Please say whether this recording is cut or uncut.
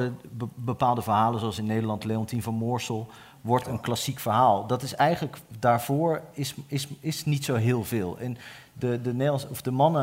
uncut